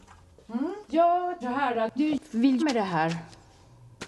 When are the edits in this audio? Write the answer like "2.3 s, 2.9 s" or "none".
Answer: 1.4 s, 2.0 s, 2.6 s